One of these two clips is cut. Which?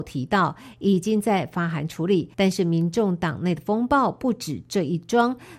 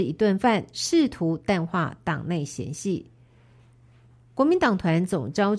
first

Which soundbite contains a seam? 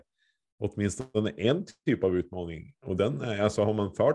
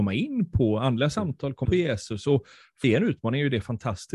second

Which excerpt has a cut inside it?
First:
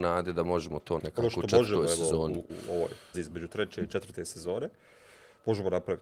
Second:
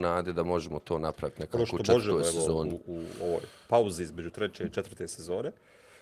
first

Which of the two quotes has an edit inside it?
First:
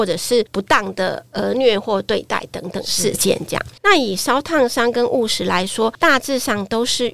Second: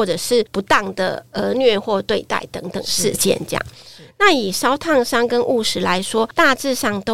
first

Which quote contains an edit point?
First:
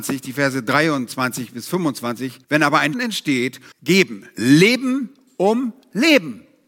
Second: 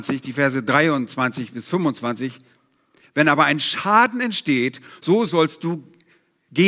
first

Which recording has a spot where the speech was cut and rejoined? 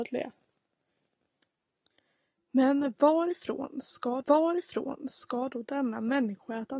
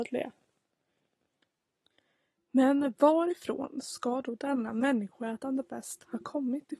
first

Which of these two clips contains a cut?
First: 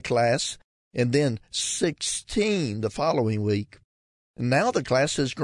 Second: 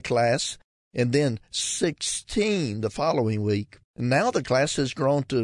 second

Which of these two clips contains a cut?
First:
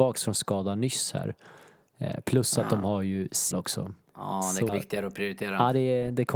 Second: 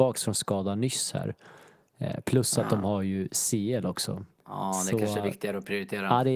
first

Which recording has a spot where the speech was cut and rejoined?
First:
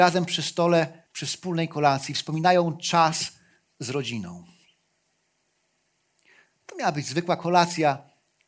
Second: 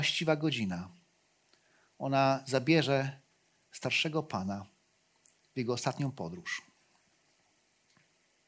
first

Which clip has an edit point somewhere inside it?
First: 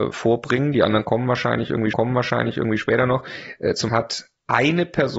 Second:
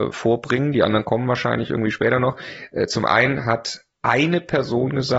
first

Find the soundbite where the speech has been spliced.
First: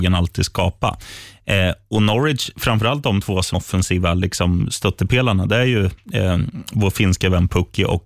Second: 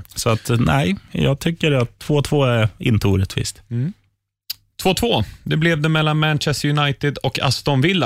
first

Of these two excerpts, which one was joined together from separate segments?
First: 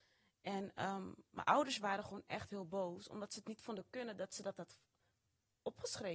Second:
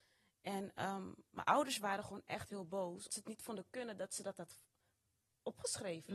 second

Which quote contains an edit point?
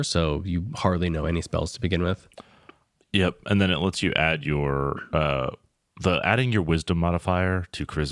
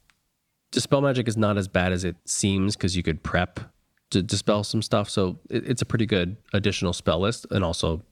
second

